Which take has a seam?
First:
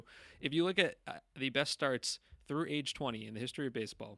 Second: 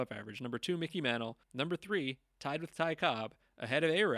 second; 1 cut; at 1.4 s

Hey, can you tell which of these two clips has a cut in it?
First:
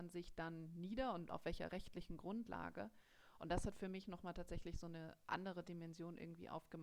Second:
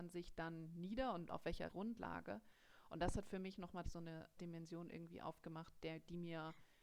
second; 3 cuts; at 1.7 s, 3.8 s, 4.4 s

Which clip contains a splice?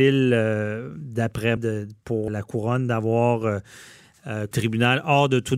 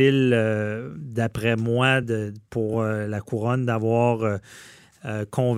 first; 3 cuts; at 1.6 s, 2.3 s, 4.5 s

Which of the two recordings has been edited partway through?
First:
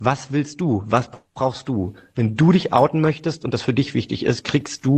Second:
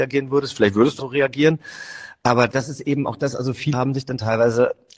second; 3 cuts; at 1.0 s, 2.5 s, 3.7 s

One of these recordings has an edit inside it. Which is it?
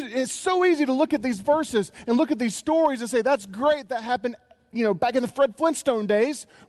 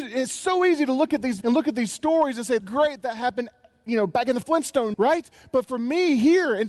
second; 4 cuts; at 1.4 s, 2.6 s, 4.4 s, 4.9 s

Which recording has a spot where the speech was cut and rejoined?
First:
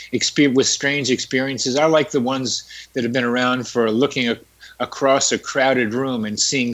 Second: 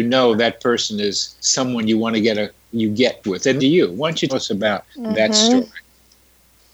second; 5 cuts; at 1.4 s, 3.2 s, 3.6 s, 4.3 s, 4.9 s

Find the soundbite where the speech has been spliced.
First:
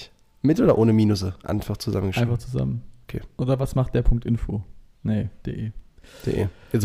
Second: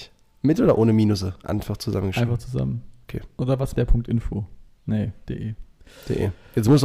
second; 1 cut; at 3.7 s

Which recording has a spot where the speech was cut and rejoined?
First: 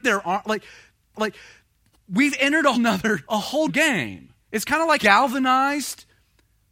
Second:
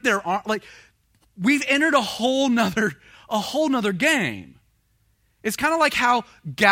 first; 6 cuts; at 1.1 s, 2.7 s, 3.2 s, 3.7 s, 4.4 s, 5.0 s

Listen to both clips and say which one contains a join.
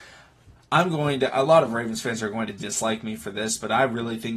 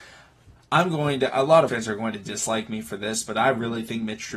second; 1 cut; at 1.7 s

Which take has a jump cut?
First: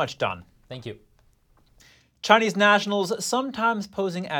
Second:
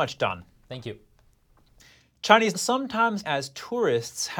second; 2 cuts; at 2.5 s, 3.2 s

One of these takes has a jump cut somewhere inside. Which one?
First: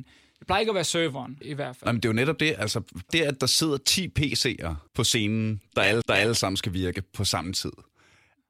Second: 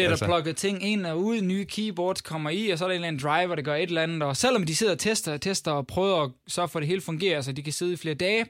first; 4 cuts; at 1.4 s, 3.1 s, 4.9 s, 6.0 s

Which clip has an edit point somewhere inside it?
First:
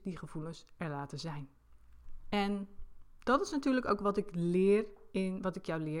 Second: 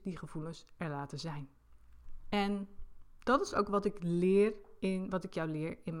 second; 1 cut; at 3.5 s

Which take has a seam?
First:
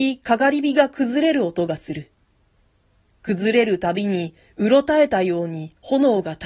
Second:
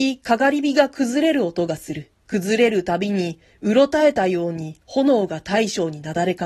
second; 1 cut; at 2.2 s

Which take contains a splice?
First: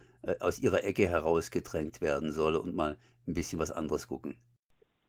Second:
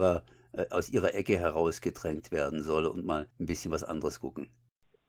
second; 1 cut; at 3.3 s

